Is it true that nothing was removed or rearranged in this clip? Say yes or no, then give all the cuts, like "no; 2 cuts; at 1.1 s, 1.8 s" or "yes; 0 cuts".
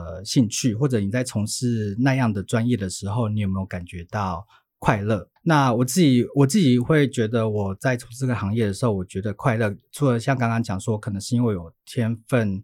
no; 1 cut; at 5.4 s